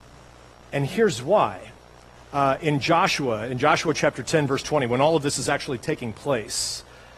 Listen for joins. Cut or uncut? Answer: uncut